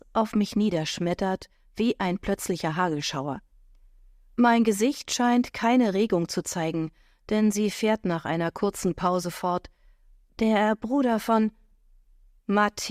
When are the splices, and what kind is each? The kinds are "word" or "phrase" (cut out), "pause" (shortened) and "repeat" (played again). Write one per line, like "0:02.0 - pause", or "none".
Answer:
none